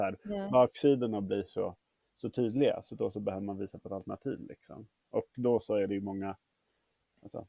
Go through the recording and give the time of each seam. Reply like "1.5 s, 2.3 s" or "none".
none